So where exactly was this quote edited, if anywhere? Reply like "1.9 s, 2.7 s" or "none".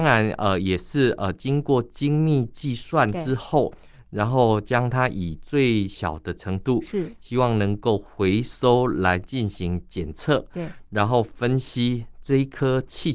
none